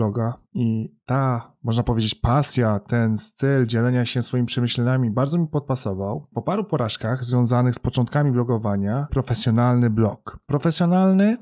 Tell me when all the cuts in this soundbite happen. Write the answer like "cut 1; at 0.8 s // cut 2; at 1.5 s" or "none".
cut 1; at 6.3 s // cut 2; at 9.1 s